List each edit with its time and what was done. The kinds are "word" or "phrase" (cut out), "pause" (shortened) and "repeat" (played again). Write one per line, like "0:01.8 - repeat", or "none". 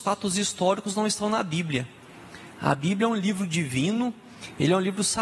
none